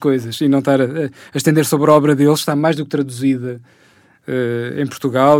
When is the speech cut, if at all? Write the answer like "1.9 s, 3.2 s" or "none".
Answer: none